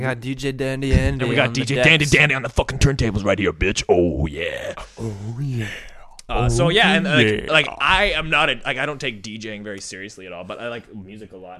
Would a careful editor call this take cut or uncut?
uncut